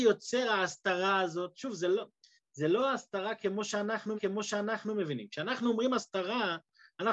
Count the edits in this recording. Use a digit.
1